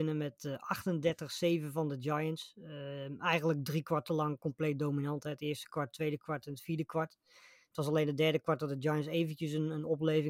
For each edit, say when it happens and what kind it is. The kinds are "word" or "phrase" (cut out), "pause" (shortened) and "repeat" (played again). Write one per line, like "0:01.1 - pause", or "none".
none